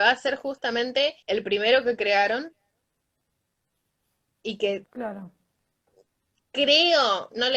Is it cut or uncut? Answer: cut